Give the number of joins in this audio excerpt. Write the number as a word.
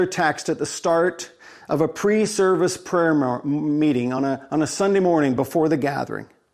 zero